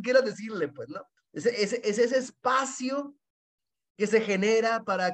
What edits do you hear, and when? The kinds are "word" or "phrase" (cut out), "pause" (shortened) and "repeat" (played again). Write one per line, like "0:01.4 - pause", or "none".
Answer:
0:01.2 - pause